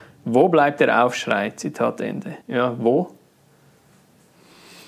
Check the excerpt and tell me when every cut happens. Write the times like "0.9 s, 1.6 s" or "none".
2.4 s